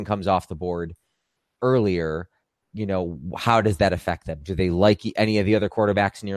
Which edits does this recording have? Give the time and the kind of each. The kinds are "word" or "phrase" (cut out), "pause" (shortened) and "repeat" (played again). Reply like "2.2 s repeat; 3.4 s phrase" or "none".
none